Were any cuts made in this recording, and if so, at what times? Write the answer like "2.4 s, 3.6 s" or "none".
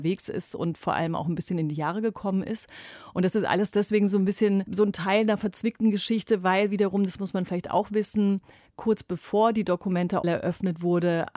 10.2 s